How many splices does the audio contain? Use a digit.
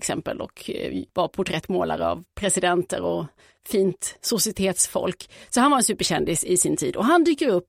0